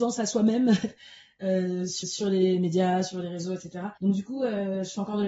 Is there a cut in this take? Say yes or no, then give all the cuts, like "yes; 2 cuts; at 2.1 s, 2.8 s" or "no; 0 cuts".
yes; 2 cuts; at 2.0 s, 4.0 s